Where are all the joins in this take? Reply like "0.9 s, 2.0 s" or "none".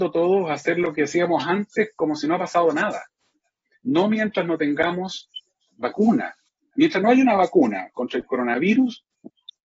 none